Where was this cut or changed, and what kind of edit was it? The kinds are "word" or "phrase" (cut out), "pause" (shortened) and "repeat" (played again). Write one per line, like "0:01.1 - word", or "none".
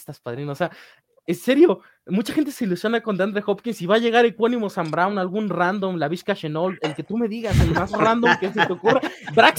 none